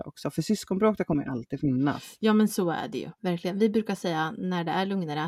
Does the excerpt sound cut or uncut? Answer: uncut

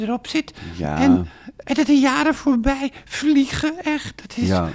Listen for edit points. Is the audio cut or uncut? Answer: cut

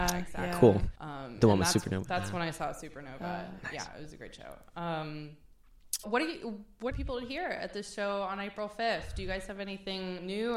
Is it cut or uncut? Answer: cut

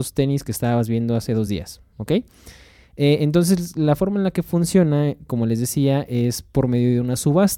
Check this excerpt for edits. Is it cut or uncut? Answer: uncut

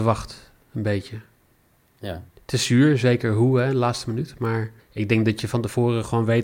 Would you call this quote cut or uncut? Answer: cut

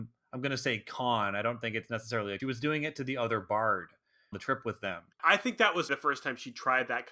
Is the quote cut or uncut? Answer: cut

